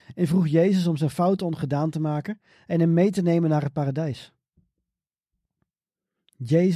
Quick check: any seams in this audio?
no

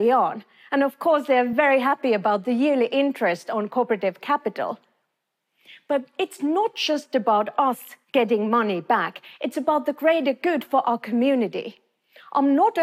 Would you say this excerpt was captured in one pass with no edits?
yes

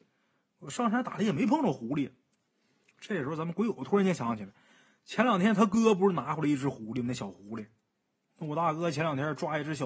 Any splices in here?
no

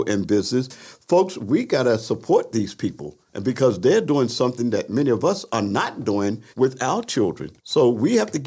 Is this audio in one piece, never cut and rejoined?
no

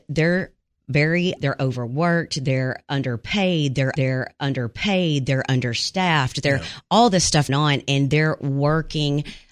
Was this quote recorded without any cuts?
no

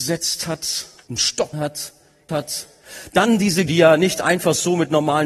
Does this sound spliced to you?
yes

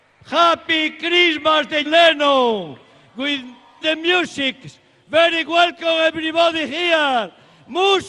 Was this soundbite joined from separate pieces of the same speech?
yes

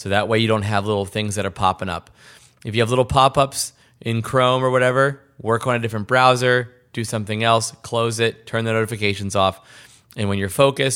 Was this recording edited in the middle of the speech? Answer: no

